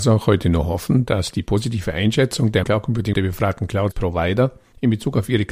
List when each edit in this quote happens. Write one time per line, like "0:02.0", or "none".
0:02.6
0:03.1
0:03.9